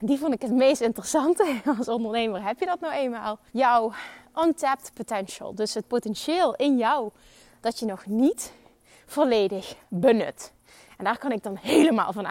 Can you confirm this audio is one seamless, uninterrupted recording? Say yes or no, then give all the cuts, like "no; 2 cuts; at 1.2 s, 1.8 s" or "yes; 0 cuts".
no; 1 cut; at 3.5 s